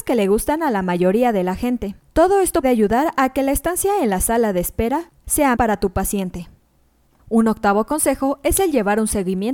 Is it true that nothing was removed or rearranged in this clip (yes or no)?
no